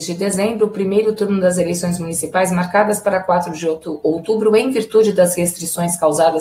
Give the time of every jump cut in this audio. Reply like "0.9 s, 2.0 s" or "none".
none